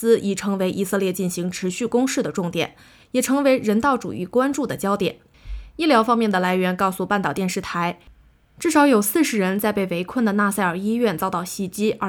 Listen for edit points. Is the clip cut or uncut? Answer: uncut